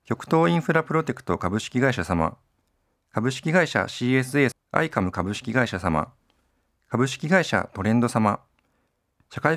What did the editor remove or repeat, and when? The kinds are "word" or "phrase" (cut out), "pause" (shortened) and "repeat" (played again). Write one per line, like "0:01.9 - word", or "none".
0:04.5 - word